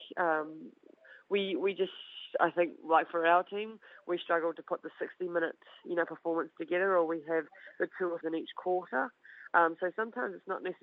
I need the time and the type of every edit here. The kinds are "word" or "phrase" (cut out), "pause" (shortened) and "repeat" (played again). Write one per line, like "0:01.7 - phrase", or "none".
0:08.2 - phrase